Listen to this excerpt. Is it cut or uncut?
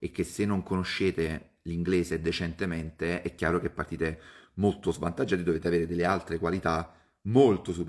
uncut